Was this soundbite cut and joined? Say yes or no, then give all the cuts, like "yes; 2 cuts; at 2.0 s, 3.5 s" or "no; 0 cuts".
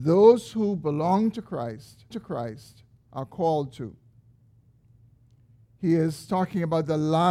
yes; 1 cut; at 2.1 s